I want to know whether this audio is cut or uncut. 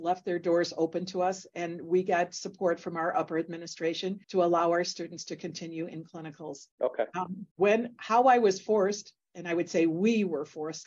cut